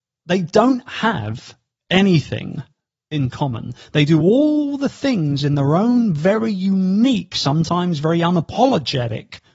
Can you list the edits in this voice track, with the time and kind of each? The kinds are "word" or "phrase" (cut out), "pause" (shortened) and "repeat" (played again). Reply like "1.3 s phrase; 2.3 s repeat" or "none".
none